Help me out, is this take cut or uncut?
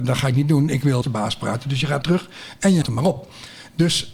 cut